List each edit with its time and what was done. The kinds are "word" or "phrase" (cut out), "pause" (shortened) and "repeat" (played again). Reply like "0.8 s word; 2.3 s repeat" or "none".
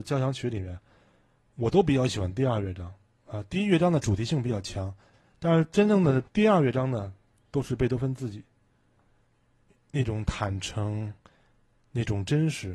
6.3 s pause